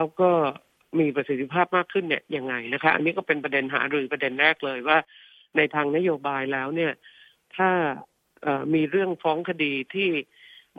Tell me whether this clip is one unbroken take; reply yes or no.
yes